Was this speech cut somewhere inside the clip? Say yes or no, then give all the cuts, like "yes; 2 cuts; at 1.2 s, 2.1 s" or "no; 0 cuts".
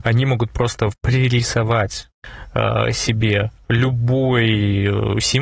yes; 1 cut; at 0.9 s